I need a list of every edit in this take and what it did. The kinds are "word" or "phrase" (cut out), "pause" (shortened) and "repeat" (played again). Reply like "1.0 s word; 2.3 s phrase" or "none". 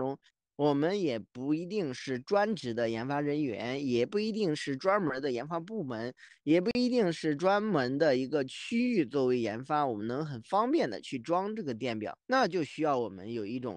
12.2 s pause

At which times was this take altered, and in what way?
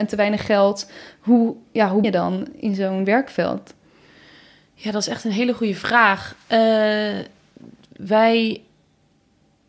2.0 s word

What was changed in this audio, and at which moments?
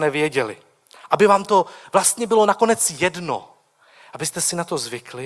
none

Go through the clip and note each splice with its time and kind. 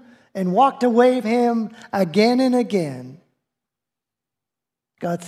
1.2 s word

